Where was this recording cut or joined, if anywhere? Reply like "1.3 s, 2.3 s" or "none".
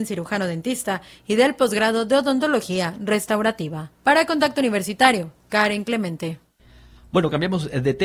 3.9 s, 5.4 s